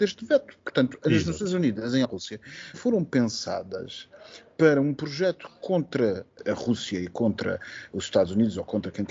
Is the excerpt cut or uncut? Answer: cut